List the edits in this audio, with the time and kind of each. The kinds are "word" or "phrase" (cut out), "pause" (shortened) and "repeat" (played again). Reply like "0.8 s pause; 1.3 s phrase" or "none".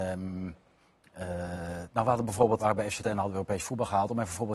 2.6 s word; 3.0 s word